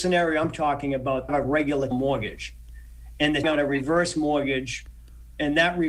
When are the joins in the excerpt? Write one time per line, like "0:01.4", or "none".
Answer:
0:01.3
0:01.9
0:03.4